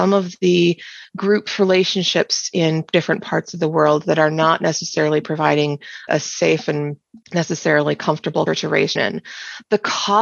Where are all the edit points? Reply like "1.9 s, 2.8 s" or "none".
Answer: 6.1 s, 7.2 s, 8.5 s, 9.0 s